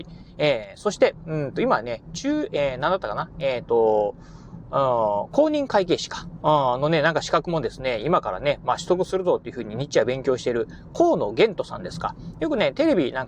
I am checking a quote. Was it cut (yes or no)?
no